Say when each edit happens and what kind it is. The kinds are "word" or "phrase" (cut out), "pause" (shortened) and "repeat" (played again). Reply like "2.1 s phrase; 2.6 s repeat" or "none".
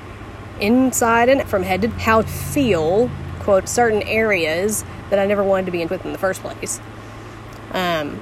1.4 s word; 1.9 s word; 2.2 s word; 3.6 s word; 5.9 s word